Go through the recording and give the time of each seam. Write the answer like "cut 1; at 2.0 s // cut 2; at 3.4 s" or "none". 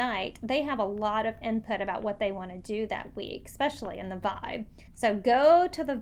cut 1; at 4.9 s